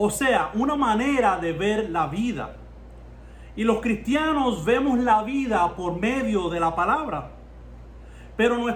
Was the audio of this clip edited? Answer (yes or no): no